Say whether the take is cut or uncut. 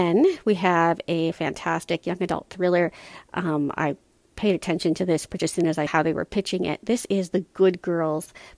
cut